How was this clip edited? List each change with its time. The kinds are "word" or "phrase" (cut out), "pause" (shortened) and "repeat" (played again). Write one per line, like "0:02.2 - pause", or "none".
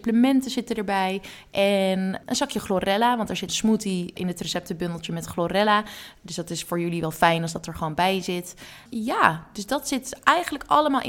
0:03.5 - word
0:08.9 - pause

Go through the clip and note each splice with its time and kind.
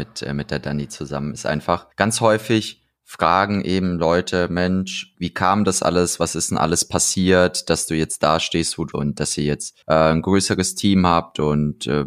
0:01.9 - pause
0:05.1 - word
0:08.9 - word
0:09.8 - pause

